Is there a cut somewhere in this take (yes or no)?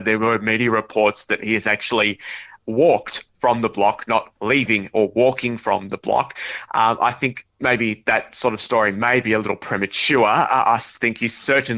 no